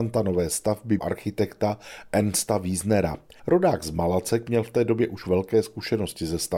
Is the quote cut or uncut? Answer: cut